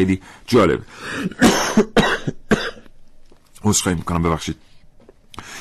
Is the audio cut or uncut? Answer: uncut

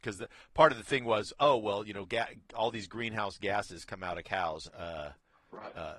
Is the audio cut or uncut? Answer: cut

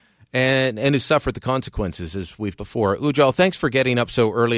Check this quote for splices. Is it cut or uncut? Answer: cut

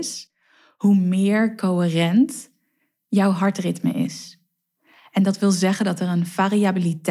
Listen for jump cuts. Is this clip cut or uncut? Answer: uncut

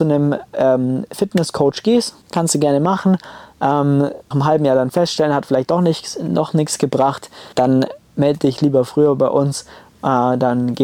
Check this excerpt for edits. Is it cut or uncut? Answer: cut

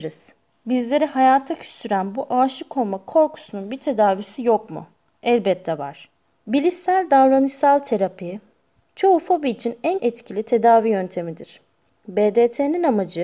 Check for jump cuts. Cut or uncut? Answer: cut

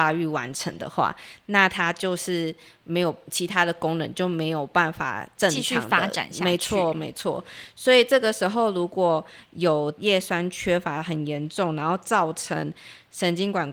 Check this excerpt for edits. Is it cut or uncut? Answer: uncut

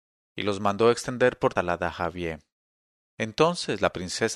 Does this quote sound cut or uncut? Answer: cut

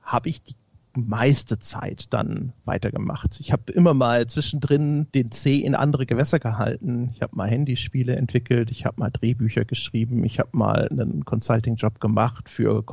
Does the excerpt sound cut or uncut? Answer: cut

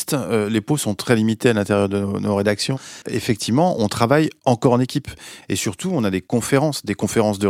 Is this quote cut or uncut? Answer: cut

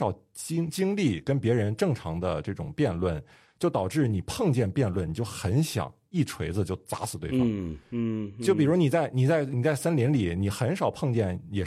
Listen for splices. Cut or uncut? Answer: uncut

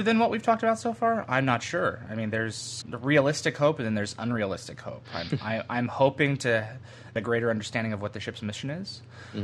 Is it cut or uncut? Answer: cut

